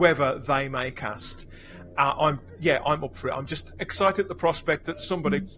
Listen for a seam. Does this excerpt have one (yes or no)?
no